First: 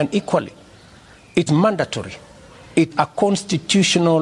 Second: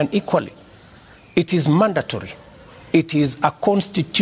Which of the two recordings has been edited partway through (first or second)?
first